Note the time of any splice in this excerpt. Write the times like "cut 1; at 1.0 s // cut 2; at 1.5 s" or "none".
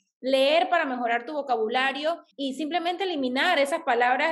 cut 1; at 2.3 s